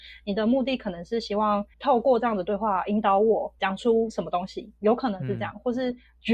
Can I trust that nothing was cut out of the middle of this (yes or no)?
yes